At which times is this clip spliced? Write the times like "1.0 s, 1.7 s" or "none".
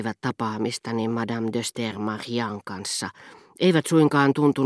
none